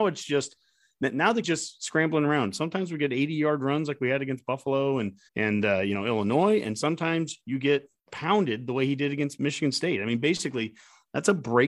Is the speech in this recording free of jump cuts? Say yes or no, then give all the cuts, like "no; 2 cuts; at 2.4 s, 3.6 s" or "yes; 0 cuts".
no; 2 cuts; at 1.4 s, 5.3 s